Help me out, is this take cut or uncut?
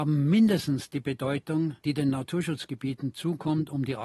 cut